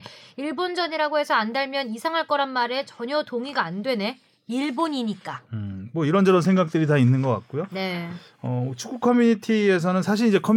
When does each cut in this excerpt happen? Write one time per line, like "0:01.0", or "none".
none